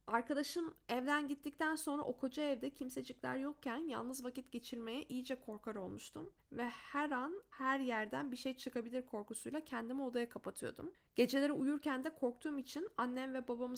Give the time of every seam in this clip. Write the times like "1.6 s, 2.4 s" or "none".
none